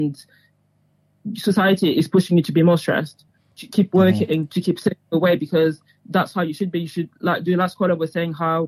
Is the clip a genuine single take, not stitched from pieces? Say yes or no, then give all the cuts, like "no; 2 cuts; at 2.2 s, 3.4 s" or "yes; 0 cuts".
yes; 0 cuts